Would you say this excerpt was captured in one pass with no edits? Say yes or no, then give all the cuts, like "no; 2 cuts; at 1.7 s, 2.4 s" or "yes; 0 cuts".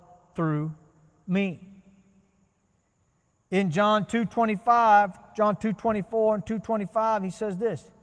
yes; 0 cuts